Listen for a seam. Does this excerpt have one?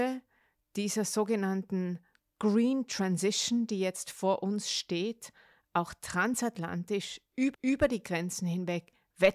yes; 1 cut; at 7.5 s

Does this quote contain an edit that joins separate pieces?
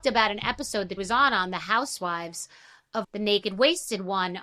yes; 2 cuts; at 1.0 s, 3.0 s

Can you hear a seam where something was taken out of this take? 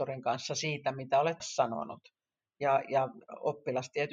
yes; 1 cut; at 1.4 s

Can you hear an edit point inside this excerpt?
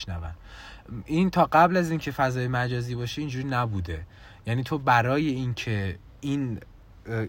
no; 0 cuts

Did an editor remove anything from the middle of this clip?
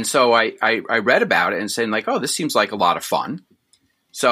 no; 0 cuts

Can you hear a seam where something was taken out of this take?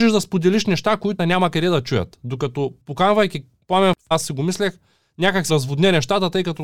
yes; 3 cuts; at 1.2 s, 4.1 s, 5.5 s

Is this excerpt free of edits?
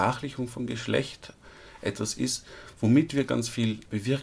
no; 1 cut; at 3.3 s

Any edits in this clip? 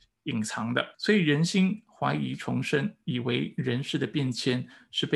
yes; 1 cut; at 0.9 s

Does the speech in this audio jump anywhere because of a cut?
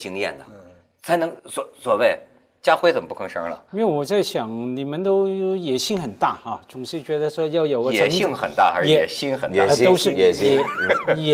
yes; 1 cut; at 1.4 s

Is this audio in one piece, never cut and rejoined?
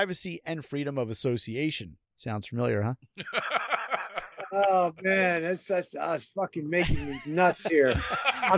no; 1 cut; at 2.1 s

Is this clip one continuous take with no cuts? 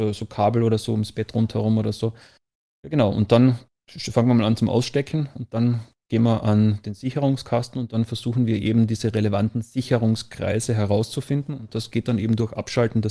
yes; 0 cuts

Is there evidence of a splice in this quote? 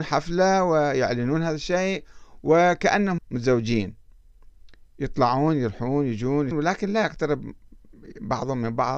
yes; 2 cuts; at 3.2 s, 6.5 s

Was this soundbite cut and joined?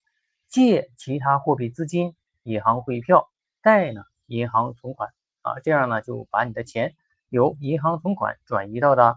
no; 0 cuts

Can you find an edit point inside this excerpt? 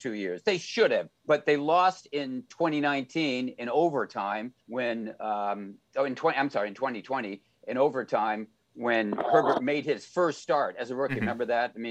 yes; 2 cuts; at 1.2 s, 4.6 s

